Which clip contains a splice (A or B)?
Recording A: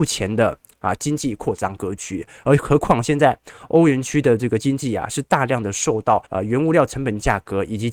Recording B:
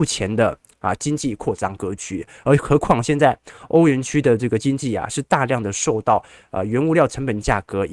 A